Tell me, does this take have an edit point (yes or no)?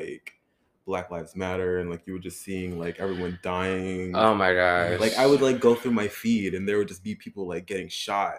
no